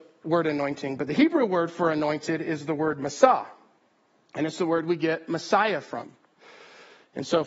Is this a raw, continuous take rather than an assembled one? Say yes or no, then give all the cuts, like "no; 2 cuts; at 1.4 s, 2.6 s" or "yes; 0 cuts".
yes; 0 cuts